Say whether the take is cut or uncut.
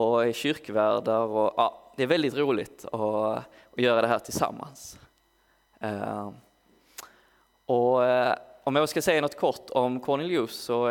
uncut